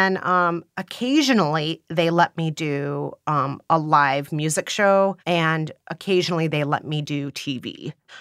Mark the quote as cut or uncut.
cut